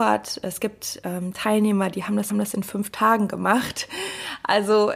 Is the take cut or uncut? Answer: cut